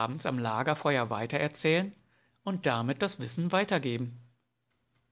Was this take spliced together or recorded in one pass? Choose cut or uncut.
uncut